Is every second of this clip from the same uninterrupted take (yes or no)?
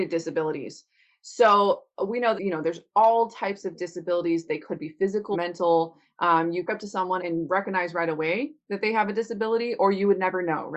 no